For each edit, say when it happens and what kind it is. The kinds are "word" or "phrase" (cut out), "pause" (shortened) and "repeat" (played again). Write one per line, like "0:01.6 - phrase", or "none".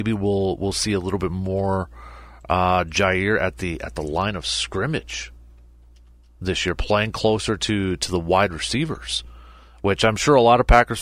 none